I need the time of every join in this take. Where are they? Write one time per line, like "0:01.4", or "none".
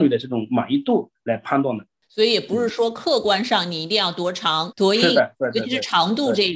0:04.7